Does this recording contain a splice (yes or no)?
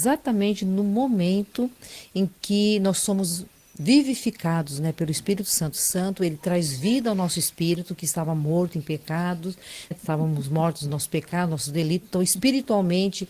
yes